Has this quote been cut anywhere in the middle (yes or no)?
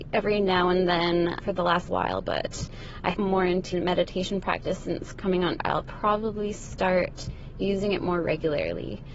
yes